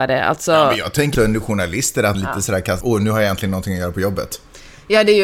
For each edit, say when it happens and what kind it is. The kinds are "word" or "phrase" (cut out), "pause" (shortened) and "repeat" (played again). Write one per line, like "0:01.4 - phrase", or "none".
0:01.1 - word
0:02.1 - word
0:02.8 - word